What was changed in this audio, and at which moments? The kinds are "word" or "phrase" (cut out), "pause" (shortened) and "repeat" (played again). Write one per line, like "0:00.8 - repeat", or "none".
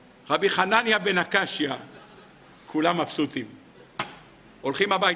none